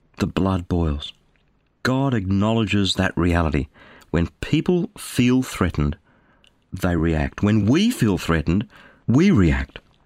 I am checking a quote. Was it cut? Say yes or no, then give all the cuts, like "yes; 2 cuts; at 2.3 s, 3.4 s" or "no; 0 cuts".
no; 0 cuts